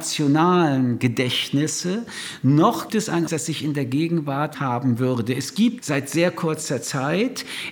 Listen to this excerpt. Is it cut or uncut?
cut